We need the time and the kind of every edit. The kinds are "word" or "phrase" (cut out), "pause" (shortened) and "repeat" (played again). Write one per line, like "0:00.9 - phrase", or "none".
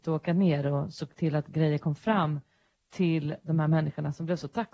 none